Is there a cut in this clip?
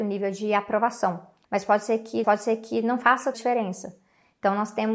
yes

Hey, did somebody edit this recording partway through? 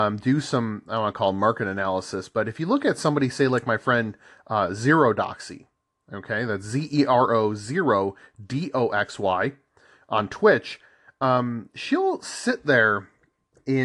no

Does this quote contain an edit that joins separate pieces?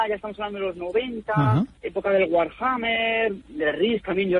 yes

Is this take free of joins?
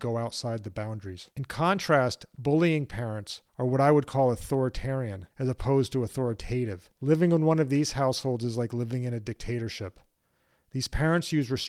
no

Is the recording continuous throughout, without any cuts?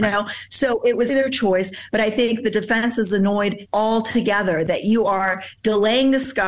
no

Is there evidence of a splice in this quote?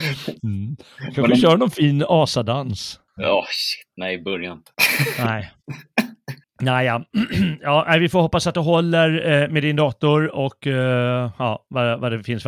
yes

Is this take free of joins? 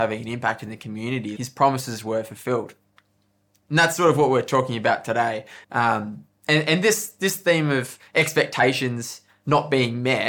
no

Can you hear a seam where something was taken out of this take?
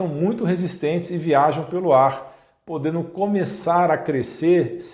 no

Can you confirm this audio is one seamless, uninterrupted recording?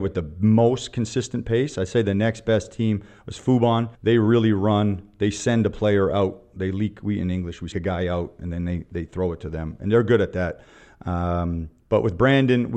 no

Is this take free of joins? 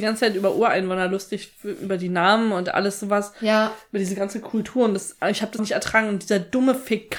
no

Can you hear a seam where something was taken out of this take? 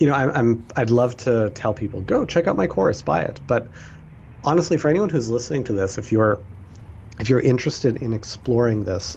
no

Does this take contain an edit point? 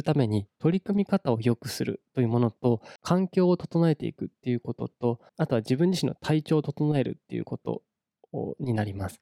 yes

